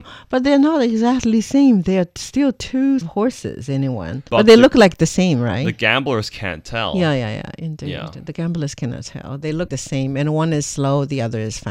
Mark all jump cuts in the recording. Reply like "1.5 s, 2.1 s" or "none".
3.0 s, 4.3 s, 9.7 s